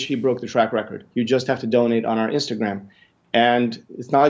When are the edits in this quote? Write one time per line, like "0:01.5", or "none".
0:01.1